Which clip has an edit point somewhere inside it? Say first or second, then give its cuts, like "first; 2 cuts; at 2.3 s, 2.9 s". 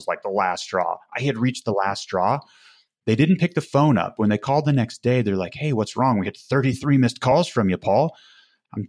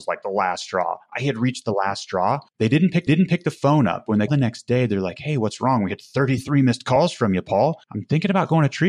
second; 4 cuts; at 2.5 s, 3.1 s, 4.3 s, 7.8 s